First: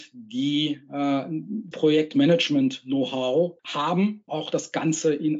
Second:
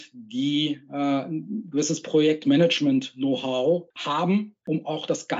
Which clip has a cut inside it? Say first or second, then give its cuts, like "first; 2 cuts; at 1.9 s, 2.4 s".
first; 2 cuts; at 1.7 s, 4.3 s